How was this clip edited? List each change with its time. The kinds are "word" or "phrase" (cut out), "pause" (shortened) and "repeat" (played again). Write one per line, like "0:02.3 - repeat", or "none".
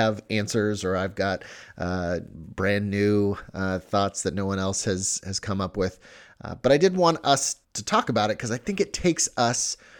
0:07.6 - pause